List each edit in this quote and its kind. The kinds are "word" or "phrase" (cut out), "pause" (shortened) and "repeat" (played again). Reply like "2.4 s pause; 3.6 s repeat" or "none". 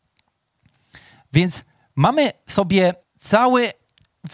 1.7 s pause; 3.0 s pause